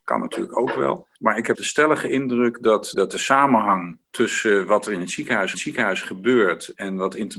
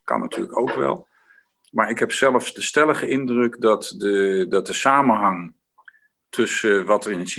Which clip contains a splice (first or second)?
first